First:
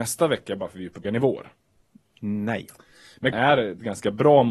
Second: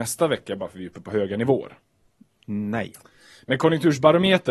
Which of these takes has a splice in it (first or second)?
first